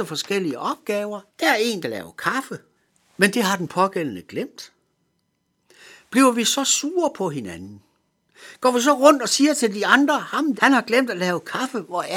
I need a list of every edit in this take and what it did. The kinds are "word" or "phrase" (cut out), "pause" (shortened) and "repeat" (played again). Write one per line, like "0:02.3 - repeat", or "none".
0:01.3 - pause
0:01.8 - word
0:02.8 - pause
0:10.6 - word